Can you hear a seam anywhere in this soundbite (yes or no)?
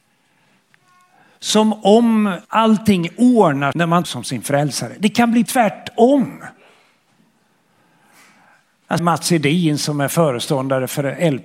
yes